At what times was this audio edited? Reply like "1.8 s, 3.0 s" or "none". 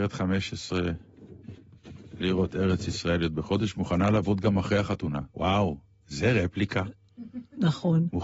5.3 s